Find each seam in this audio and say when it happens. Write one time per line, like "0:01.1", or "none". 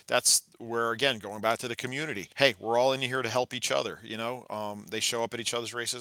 0:02.3